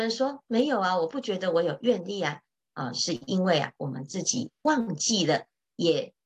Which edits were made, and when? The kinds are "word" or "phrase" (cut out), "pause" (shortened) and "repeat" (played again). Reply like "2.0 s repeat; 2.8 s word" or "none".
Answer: none